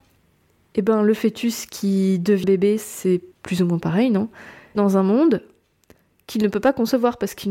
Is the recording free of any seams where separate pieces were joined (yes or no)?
no